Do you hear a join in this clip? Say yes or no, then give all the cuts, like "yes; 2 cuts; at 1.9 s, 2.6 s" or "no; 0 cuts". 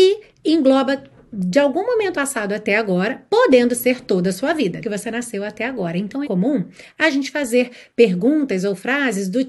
yes; 3 cuts; at 2.1 s, 4.8 s, 6.2 s